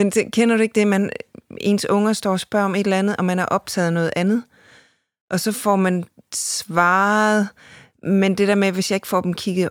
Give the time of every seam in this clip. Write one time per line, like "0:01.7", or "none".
none